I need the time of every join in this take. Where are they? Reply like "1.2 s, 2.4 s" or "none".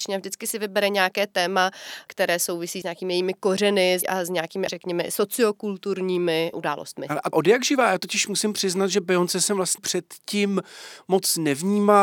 2.8 s, 4.0 s, 4.7 s, 6.5 s, 7.3 s, 9.8 s